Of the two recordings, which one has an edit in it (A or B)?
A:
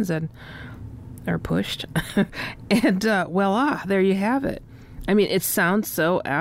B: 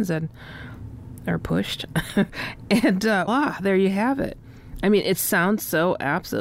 B